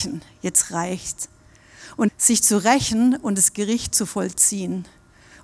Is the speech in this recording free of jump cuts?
no; 1 cut; at 2.1 s

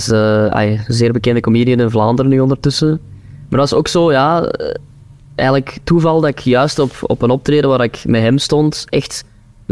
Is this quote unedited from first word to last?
yes; 0 cuts

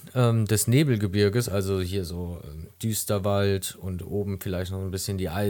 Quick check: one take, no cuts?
yes; 0 cuts

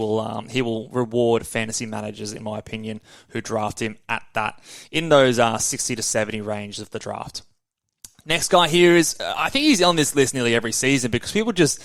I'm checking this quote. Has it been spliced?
no; 0 cuts

